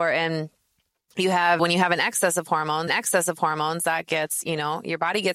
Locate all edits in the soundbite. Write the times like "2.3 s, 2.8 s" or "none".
1.6 s, 2.9 s